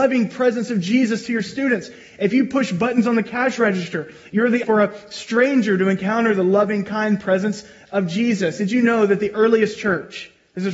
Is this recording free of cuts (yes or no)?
no